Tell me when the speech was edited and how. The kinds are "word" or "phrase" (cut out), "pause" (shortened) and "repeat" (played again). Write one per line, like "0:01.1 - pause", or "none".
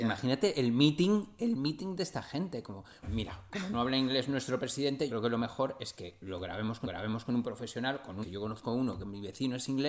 0:03.0 - word
0:05.1 - word
0:06.8 - repeat
0:08.2 - word